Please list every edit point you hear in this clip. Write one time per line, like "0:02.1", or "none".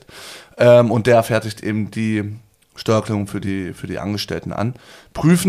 none